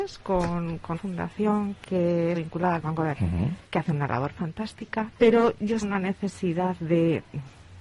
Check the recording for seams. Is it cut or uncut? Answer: cut